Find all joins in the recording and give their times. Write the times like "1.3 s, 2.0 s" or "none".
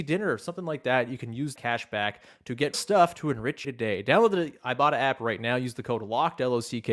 1.6 s, 2.7 s, 3.6 s